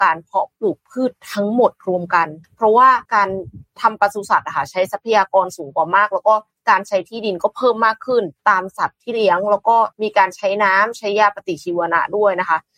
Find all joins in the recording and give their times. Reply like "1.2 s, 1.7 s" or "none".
2.4 s, 3.0 s, 3.7 s, 6.5 s, 8.4 s, 9.9 s

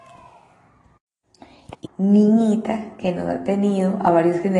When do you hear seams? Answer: 1.8 s

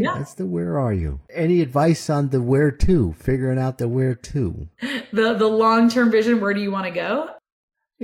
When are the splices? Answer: 4.7 s

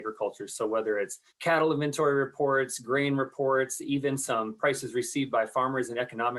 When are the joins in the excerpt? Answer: 1.3 s

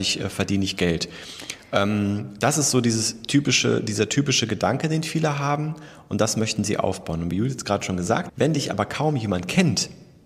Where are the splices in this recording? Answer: 8.3 s

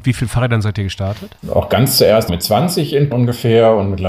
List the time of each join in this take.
2.3 s, 3.1 s

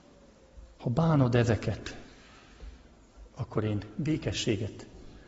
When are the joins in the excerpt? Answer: none

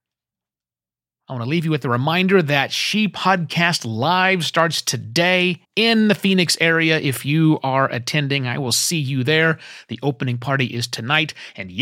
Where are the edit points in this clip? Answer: 5.6 s

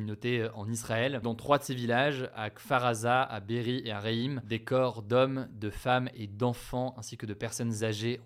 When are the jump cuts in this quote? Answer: 1.2 s

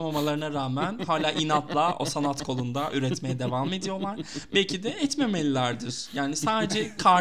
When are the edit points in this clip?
none

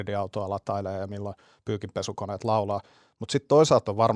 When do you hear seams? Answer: none

